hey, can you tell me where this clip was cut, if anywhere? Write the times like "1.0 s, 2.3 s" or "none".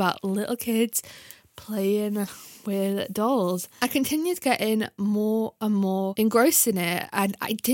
none